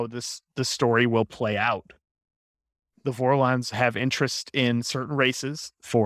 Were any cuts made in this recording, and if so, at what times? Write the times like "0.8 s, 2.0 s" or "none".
none